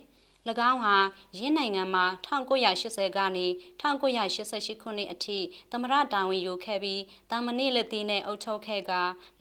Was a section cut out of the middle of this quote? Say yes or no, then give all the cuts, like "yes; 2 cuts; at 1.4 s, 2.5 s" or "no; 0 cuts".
no; 0 cuts